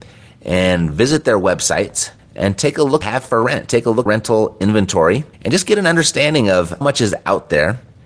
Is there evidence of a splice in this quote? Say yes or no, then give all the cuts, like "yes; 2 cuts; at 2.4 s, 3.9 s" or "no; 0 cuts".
yes; 5 cuts; at 2.2 s, 3.0 s, 4.1 s, 5.3 s, 6.8 s